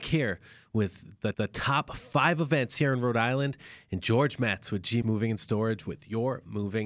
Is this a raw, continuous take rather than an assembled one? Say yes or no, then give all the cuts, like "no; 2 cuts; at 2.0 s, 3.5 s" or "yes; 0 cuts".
no; 2 cuts; at 1.3 s, 5.0 s